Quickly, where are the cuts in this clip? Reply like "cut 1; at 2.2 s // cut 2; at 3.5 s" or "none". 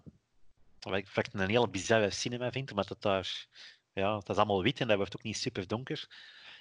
none